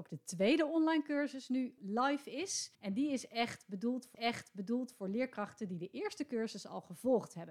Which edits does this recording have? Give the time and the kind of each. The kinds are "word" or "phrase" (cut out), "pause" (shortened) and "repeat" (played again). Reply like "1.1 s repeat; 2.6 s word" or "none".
1.8 s word; 2.7 s pause; 4.1 s repeat